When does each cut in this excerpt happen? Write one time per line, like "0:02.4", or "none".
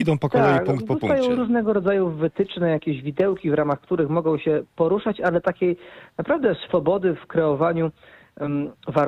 none